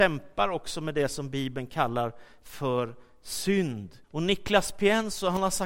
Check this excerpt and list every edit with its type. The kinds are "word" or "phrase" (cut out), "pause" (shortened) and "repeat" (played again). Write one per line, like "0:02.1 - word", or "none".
0:04.0 - pause